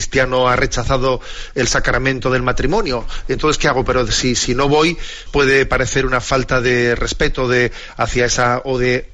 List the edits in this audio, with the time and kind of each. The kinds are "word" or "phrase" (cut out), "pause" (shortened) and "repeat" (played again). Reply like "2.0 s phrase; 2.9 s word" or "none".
5.3 s word